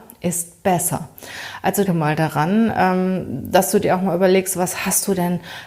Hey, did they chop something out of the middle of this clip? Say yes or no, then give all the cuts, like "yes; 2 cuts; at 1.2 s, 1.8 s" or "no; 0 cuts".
yes; 1 cut; at 1.8 s